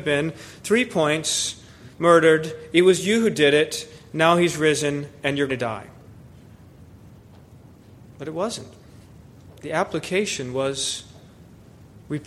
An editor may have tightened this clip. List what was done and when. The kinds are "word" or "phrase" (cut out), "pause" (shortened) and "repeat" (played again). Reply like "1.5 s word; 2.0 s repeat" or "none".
1.9 s word; 5.5 s word